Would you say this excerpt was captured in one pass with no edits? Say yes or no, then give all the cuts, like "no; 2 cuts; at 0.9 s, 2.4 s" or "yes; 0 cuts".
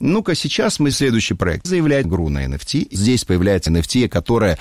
no; 5 cuts; at 0.9 s, 1.6 s, 2.0 s, 2.9 s, 3.7 s